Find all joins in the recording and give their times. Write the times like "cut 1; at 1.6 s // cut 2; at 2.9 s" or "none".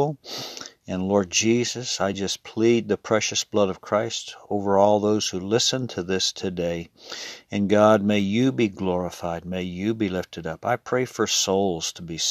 none